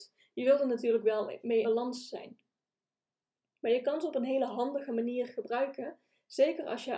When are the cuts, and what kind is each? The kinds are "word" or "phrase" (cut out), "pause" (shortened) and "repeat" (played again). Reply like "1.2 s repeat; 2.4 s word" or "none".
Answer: 1.6 s word